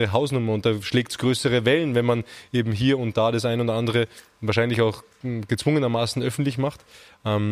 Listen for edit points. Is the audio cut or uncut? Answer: uncut